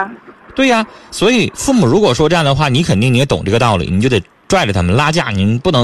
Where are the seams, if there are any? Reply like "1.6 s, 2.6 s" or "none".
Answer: none